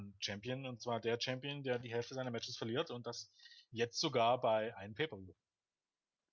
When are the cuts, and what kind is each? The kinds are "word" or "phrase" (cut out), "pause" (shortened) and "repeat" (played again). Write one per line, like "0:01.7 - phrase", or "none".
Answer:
none